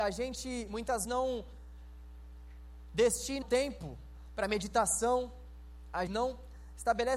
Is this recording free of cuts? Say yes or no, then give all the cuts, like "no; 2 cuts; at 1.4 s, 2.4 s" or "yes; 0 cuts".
no; 3 cuts; at 1.0 s, 3.4 s, 6.1 s